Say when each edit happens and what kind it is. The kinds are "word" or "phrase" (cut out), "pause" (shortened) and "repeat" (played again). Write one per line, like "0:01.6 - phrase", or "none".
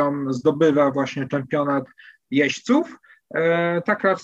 none